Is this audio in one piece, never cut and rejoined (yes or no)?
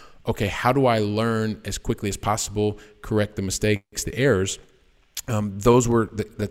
yes